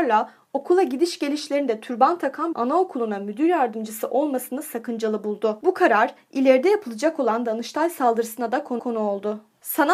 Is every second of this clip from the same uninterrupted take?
no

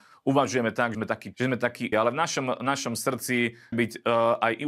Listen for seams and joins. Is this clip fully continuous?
no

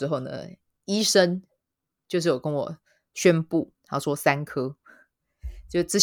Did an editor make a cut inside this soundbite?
no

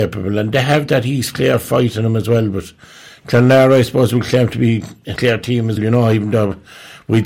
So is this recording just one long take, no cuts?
no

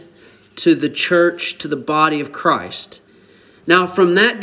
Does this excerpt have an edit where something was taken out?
no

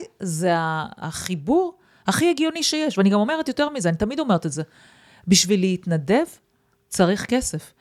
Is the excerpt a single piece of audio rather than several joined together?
yes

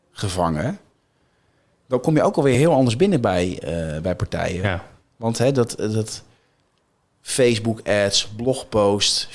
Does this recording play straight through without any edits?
yes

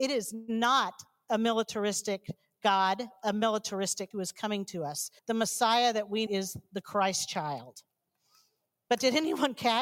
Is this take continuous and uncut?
no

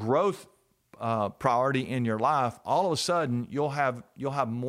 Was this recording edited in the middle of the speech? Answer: no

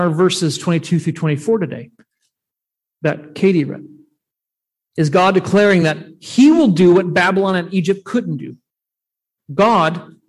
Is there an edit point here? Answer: no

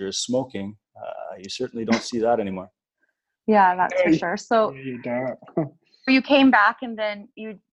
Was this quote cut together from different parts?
yes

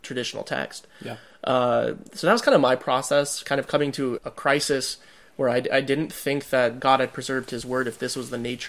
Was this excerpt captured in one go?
no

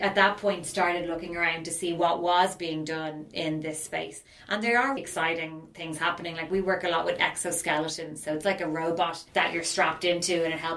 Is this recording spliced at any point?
yes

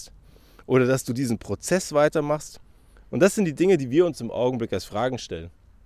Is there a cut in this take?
no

